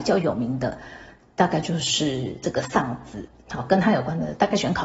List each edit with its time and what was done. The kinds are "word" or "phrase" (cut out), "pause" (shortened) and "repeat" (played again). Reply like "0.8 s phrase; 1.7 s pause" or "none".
none